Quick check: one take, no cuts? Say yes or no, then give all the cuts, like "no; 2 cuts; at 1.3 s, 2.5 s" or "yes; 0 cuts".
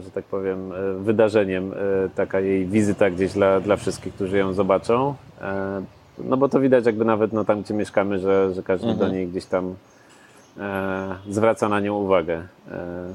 yes; 0 cuts